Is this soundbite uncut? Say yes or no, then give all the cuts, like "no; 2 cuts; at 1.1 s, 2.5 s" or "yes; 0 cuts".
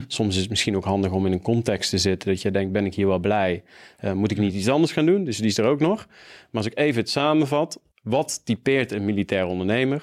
no; 1 cut; at 7.9 s